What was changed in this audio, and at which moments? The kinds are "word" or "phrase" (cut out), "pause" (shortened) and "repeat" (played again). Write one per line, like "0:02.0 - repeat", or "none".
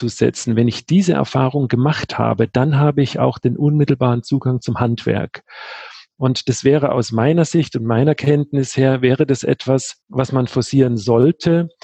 0:10.0 - pause